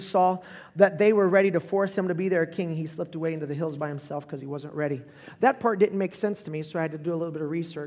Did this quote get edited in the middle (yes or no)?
no